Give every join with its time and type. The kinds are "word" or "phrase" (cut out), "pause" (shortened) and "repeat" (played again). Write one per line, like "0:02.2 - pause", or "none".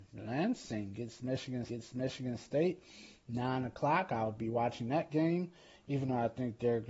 0:01.7 - repeat